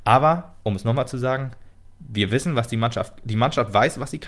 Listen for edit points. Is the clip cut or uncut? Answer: uncut